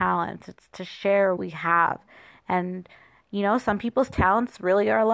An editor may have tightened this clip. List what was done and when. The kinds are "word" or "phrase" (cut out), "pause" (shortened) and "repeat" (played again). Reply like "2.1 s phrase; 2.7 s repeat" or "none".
1.4 s word